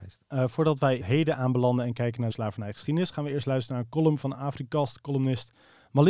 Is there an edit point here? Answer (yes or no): yes